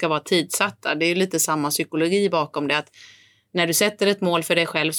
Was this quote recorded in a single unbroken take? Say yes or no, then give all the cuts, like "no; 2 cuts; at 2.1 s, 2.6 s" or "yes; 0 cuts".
yes; 0 cuts